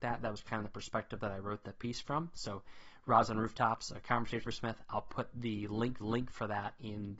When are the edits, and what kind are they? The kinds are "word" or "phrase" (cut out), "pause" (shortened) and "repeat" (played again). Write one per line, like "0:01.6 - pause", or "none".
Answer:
0:04.5 - word
0:06.0 - repeat